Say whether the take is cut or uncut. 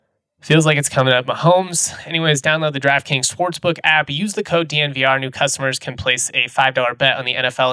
uncut